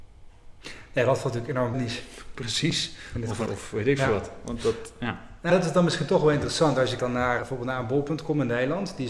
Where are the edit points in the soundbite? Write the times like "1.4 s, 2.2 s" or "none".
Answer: 1.7 s, 3.5 s, 5.5 s, 7.0 s, 7.4 s